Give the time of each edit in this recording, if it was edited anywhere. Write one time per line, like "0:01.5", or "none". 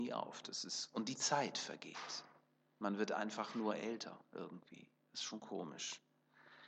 none